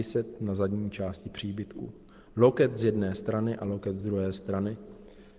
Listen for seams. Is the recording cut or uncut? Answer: uncut